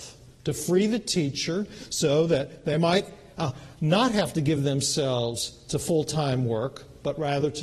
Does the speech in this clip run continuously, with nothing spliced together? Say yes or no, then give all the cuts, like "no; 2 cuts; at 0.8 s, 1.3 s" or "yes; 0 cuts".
yes; 0 cuts